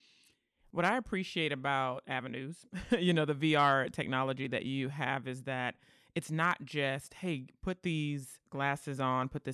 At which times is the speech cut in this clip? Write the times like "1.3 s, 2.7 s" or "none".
none